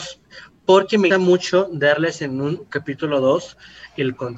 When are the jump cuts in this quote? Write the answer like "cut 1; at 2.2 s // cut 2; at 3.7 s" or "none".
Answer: cut 1; at 1.1 s